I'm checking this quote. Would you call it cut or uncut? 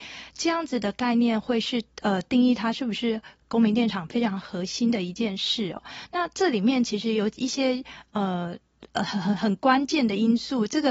cut